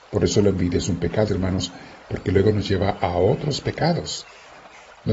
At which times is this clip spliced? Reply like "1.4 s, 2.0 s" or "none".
1.3 s